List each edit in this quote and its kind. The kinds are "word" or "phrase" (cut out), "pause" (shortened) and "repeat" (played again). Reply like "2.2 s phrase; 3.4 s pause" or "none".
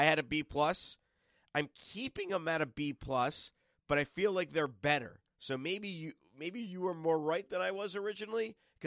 none